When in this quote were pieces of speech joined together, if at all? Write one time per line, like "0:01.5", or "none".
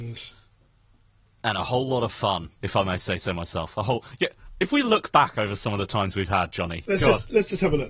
0:02.5